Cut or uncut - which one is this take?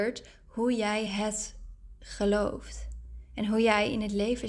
uncut